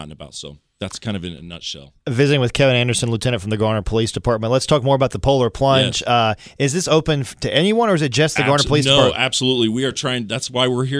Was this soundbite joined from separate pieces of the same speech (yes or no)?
no